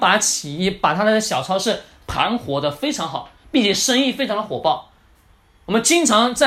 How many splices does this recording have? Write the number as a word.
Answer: zero